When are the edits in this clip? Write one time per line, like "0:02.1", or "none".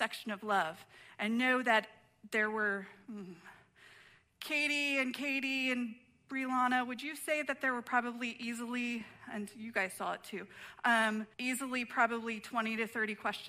0:11.3